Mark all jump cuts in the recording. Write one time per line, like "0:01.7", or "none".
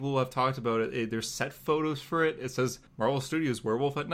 0:02.9